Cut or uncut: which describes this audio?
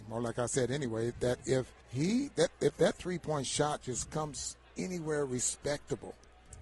cut